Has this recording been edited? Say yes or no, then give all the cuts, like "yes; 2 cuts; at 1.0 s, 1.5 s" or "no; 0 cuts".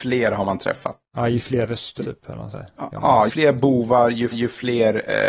yes; 5 cuts; at 1.0 s, 2.0 s, 2.5 s, 3.3 s, 4.3 s